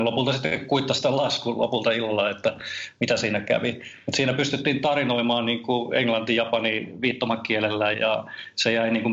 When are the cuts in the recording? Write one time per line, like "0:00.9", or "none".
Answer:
0:07.9